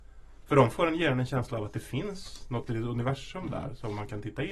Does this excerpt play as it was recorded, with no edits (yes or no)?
yes